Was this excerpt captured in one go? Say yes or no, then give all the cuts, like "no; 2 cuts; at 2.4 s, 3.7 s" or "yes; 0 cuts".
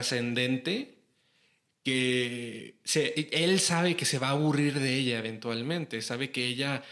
yes; 0 cuts